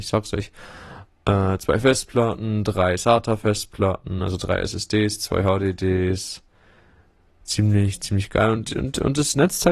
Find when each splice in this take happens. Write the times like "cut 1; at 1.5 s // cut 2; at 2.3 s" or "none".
none